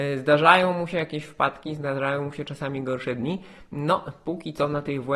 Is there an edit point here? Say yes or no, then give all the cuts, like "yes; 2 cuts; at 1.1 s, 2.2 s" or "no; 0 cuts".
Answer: no; 0 cuts